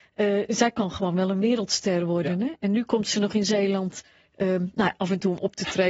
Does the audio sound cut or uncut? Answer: uncut